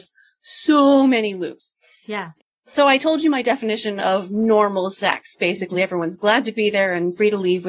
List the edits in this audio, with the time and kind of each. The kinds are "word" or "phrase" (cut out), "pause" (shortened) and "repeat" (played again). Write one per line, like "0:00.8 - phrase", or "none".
none